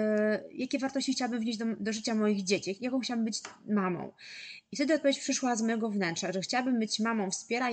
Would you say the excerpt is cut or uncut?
uncut